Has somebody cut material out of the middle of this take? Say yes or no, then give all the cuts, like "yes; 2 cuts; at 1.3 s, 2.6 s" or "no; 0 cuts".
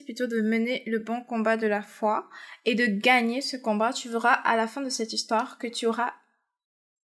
no; 0 cuts